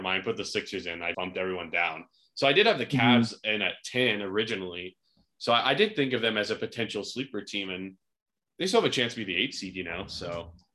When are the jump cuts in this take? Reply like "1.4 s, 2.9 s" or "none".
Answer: 1.1 s